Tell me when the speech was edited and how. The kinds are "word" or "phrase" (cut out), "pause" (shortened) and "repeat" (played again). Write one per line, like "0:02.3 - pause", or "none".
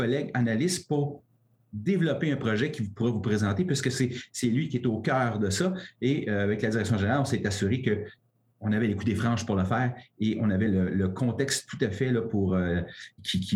none